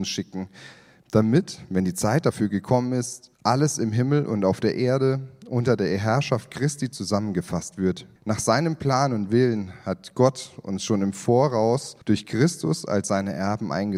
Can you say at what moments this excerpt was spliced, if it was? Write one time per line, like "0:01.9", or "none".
0:03.3
0:08.2
0:12.0